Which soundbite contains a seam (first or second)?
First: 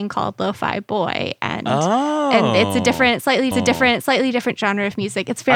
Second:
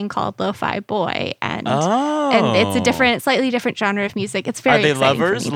first